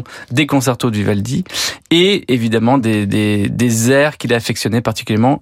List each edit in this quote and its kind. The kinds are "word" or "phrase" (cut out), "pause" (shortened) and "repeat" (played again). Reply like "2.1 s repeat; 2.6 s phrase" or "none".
none